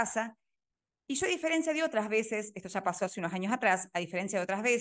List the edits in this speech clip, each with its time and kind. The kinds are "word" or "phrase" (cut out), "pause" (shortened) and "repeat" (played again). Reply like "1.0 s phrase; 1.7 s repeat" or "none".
none